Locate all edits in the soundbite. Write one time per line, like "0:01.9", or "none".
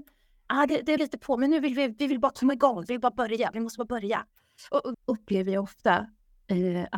0:01.0
0:04.9